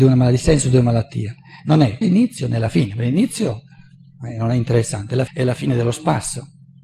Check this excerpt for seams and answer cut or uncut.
cut